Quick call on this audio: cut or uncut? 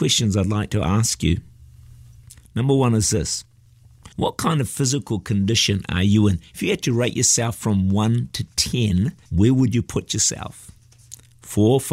cut